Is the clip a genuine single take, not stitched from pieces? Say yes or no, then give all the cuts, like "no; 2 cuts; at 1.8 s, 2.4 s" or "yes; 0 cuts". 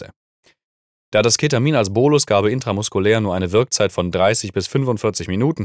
yes; 0 cuts